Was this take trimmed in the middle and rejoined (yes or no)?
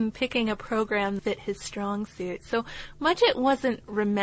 yes